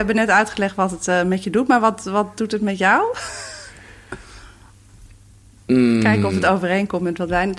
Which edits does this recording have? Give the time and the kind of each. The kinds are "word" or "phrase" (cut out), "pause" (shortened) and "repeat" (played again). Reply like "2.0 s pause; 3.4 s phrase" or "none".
none